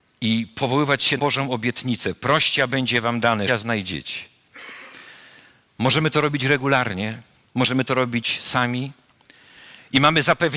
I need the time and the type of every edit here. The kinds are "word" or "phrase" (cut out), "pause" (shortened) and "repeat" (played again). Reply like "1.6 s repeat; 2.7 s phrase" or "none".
1.2 s word; 3.5 s word